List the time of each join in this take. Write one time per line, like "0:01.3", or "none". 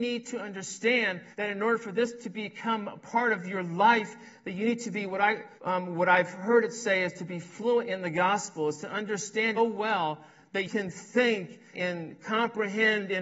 0:01.3
0:05.6
0:09.6
0:10.6
0:11.7

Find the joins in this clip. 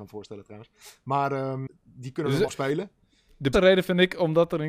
0:01.7
0:02.5
0:03.5

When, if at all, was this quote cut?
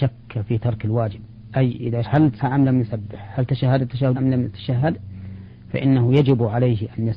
0:02.0
0:02.4
0:04.1

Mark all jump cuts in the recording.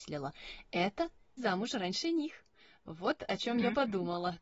0:01.4

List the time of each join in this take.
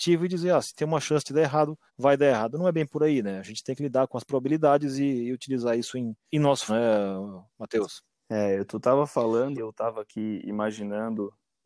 0:01.9
0:06.3
0:06.7
0:07.5
0:09.6

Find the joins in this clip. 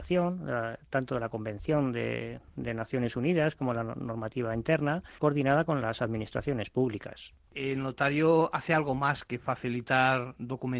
0:05.2

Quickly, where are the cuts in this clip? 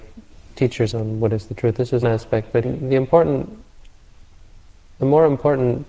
0:00.9
0:02.0
0:02.6

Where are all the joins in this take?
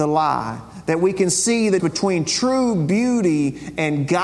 0:01.8

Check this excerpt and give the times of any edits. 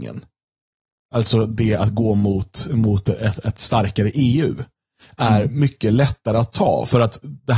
none

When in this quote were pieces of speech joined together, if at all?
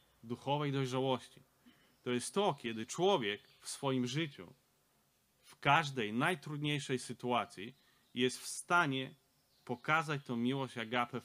none

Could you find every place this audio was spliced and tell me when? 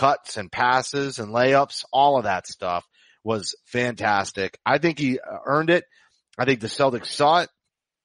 none

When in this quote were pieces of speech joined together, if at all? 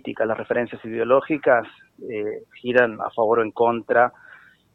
none

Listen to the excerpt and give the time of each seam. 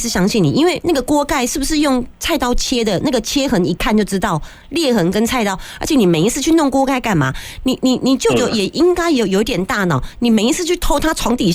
none

